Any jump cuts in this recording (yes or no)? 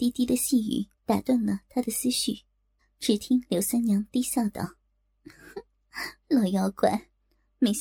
yes